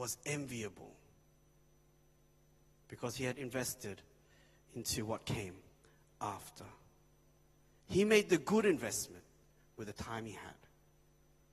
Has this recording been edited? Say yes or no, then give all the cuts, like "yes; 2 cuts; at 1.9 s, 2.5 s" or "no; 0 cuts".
no; 0 cuts